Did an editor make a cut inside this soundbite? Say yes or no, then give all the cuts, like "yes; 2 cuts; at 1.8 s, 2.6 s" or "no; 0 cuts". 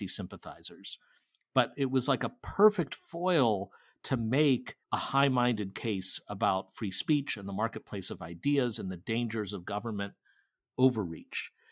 yes; 1 cut; at 4.8 s